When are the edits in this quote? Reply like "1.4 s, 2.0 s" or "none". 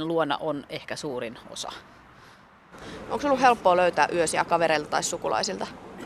none